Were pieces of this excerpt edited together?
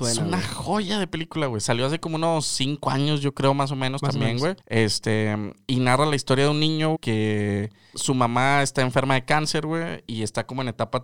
yes; 3 cuts; at 4.6 s, 6.9 s, 7.9 s

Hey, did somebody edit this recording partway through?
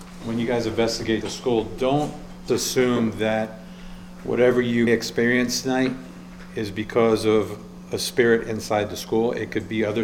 yes; 3 cuts; at 1.2 s, 2.5 s, 4.9 s

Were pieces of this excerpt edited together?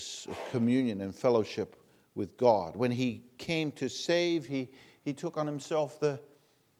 no; 0 cuts

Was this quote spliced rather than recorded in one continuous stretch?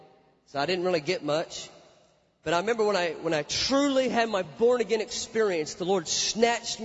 no; 0 cuts

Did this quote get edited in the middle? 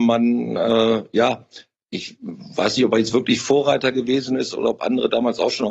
no; 0 cuts

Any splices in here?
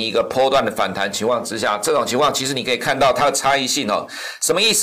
no; 0 cuts

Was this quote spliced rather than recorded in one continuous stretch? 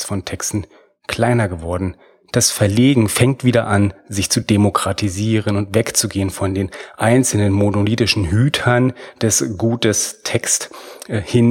no; 0 cuts

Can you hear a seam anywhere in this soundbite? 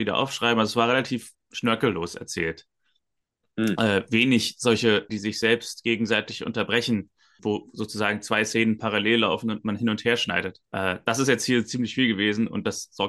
yes; 4 cuts; at 1.3 s, 5.1 s, 7.4 s, 10.7 s

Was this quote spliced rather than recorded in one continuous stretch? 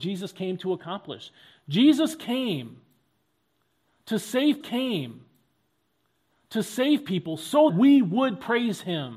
yes; 2 cuts; at 4.6 s, 7.7 s

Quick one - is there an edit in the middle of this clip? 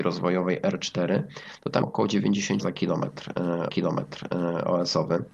yes; 3 cuts; at 1.8 s, 2.6 s, 3.7 s

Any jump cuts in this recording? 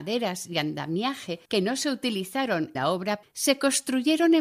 yes; 3 cuts; at 1.5 s, 2.7 s, 3.2 s

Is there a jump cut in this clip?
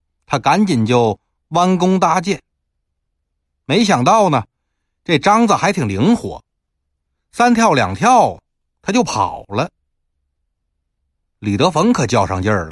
no; 0 cuts

